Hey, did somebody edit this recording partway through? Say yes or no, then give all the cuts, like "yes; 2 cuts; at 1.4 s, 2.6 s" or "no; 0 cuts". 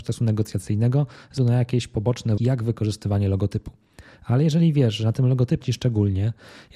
yes; 3 cuts; at 1.4 s, 2.4 s, 5.6 s